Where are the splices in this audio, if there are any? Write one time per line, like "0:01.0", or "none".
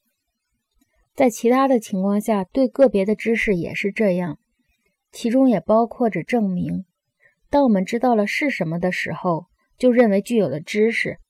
none

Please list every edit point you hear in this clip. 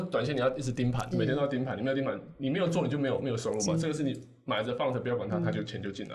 0:01.1

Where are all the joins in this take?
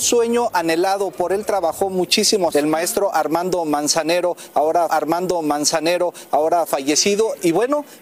0:02.5
0:04.9

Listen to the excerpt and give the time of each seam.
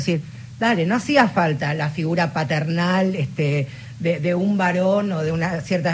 none

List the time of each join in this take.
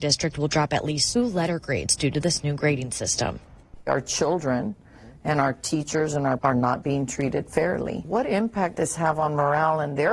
0:01.2
0:06.4
0:08.7

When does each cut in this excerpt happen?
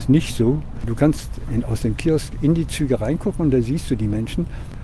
none

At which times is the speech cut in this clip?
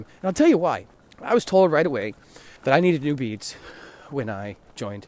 0:00.9
0:02.6

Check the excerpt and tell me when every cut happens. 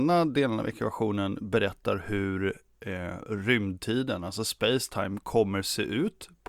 none

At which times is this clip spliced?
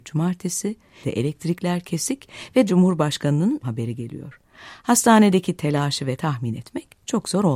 0:01.0
0:02.7
0:03.6
0:06.2

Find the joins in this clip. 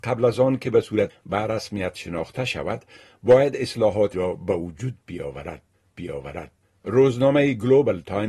0:01.1
0:04.1
0:05.9

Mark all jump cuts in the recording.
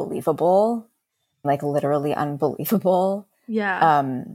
0:01.4

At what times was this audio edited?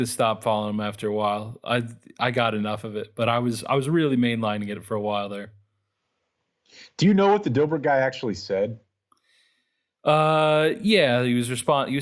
none

